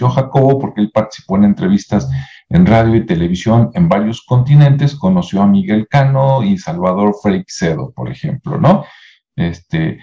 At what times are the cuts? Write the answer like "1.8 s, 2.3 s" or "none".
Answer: none